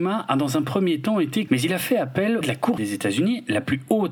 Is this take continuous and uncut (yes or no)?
no